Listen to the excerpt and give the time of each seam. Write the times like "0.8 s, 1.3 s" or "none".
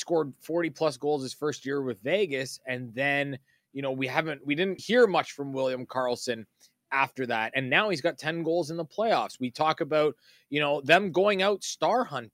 4.8 s